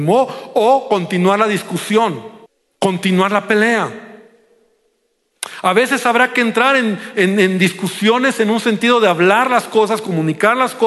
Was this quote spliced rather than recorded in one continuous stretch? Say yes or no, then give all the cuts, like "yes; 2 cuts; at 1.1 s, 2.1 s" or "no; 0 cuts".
yes; 1 cut; at 2.5 s